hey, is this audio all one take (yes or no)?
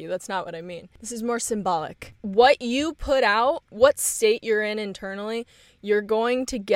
yes